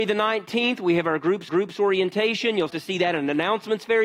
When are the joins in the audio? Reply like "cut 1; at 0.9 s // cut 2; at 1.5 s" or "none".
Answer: cut 1; at 1.5 s // cut 2; at 2.7 s